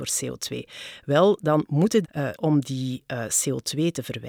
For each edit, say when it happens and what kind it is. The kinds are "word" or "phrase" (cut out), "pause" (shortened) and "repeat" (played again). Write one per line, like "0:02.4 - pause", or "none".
0:02.0 - word
0:02.4 - phrase